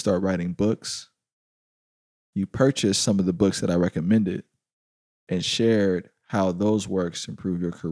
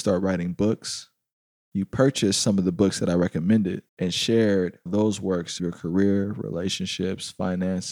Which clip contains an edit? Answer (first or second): second